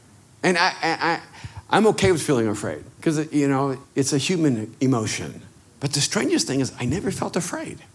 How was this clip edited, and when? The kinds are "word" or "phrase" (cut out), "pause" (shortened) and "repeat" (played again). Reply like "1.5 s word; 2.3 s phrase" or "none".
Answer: 2.9 s pause; 3.8 s pause; 5.6 s pause